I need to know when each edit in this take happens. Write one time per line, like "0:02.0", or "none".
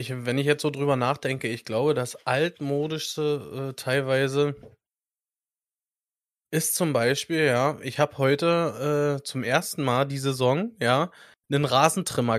none